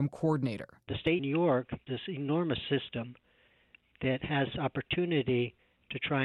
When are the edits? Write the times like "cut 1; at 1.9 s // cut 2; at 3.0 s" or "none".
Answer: cut 1; at 1.2 s // cut 2; at 1.9 s // cut 3; at 4.5 s